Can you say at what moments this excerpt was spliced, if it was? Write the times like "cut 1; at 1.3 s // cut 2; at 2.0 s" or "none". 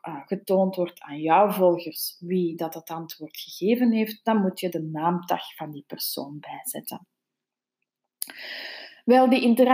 cut 1; at 4.7 s